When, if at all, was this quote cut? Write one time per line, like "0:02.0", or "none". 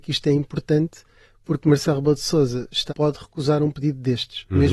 0:02.9